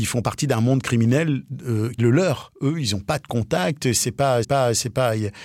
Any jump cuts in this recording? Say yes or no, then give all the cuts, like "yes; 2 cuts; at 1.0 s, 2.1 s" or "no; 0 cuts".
yes; 2 cuts; at 2.0 s, 4.4 s